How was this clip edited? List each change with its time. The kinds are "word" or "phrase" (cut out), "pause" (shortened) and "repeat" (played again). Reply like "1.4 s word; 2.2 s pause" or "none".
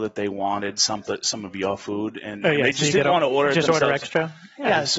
none